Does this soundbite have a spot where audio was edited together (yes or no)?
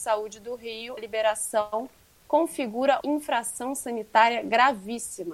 yes